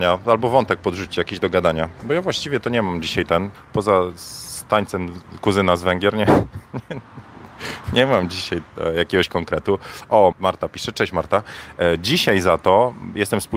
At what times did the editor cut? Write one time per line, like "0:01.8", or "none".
0:03.5
0:10.3